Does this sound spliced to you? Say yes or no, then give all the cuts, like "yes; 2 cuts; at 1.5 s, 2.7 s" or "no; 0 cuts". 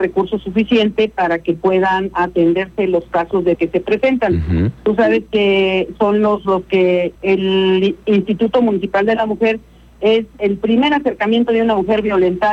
yes; 3 cuts; at 3.5 s, 6.4 s, 7.2 s